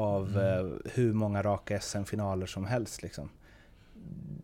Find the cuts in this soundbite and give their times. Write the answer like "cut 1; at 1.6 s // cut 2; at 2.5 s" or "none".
none